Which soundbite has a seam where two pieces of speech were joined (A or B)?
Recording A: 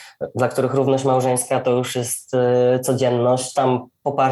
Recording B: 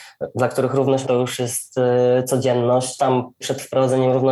B